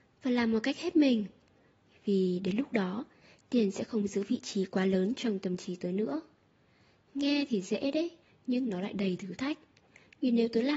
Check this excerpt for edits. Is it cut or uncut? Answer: cut